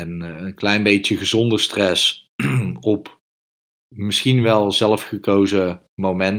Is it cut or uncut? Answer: uncut